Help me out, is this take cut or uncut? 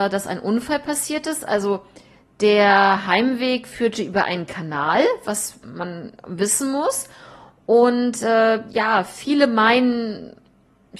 uncut